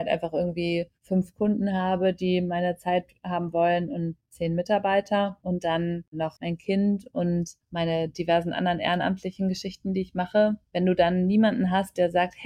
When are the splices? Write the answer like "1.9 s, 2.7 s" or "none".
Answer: 0.9 s